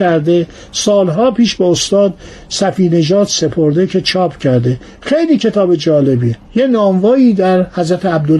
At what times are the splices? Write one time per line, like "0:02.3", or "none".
0:06.4